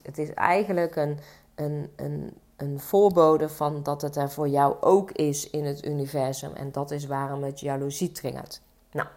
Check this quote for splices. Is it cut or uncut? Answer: uncut